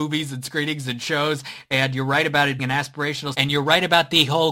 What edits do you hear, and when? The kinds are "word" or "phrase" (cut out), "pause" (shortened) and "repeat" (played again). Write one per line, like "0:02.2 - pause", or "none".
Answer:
0:02.6 - word
0:03.3 - word